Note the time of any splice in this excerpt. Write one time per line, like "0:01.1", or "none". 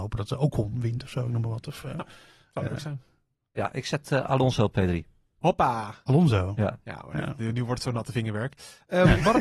none